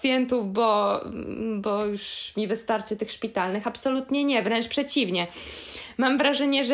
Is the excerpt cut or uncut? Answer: uncut